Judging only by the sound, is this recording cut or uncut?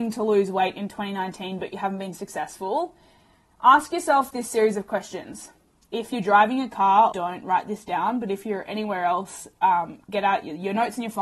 cut